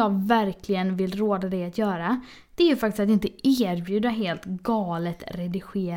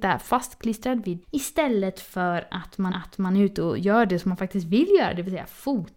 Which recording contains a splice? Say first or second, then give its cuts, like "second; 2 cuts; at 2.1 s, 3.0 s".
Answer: second; 2 cuts; at 1.2 s, 2.9 s